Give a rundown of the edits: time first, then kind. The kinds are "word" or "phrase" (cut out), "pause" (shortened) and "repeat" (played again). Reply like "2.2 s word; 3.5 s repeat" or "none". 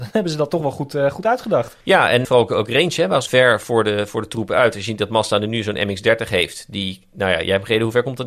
1.8 s pause; 2.2 s word; 3.3 s phrase